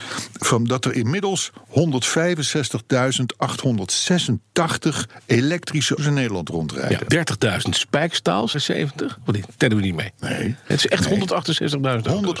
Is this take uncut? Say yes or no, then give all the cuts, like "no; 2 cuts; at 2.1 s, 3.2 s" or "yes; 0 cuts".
no; 4 cuts; at 6.0 s, 7.1 s, 8.5 s, 10.7 s